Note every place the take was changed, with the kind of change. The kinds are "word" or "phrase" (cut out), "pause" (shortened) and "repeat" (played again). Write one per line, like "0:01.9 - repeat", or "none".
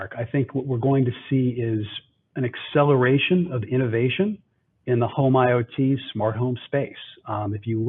none